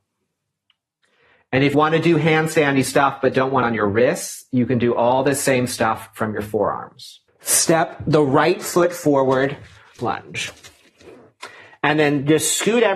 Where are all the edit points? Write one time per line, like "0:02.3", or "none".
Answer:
0:01.7
0:03.6
0:07.3
0:10.0

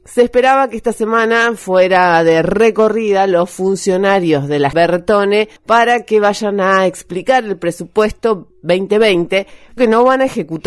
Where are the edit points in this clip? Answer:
0:04.7
0:05.6
0:09.8

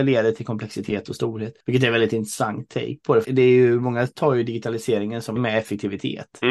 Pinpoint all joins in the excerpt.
0:01.6
0:03.2
0:05.4

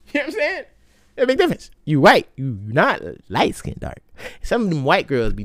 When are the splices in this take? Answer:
0:03.2

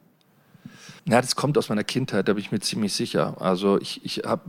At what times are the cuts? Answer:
0:01.0

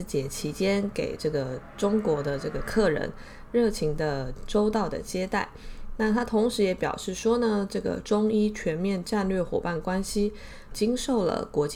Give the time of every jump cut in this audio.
0:10.7

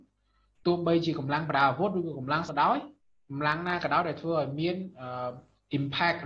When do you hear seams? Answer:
0:02.5
0:03.0

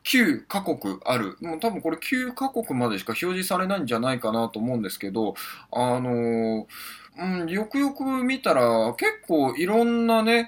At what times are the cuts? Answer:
0:07.1

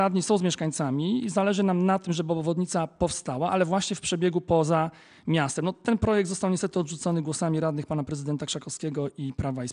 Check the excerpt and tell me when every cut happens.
none

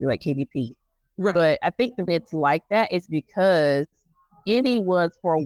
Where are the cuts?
0:02.1

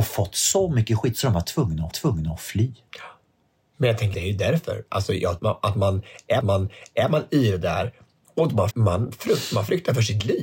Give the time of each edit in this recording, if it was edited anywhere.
0:01.9
0:04.1
0:05.4
0:06.4
0:08.7

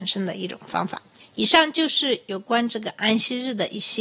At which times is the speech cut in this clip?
none

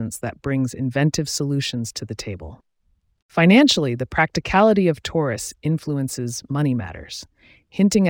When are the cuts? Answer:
none

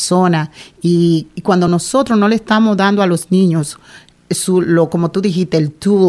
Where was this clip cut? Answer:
none

